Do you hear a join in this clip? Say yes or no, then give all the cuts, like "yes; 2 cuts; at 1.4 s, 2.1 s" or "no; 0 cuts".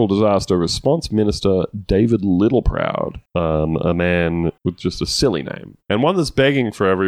yes; 3 cuts; at 3.3 s, 4.6 s, 5.8 s